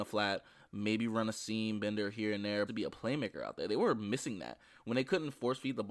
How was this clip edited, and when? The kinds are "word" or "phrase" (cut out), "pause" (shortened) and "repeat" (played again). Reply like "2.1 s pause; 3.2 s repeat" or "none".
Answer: 2.7 s phrase